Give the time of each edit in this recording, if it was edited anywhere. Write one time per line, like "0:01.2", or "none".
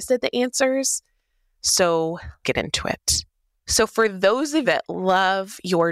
0:02.4
0:04.6